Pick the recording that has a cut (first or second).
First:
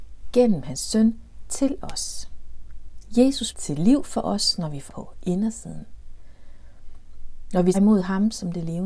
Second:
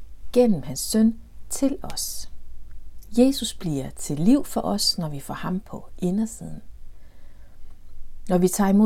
first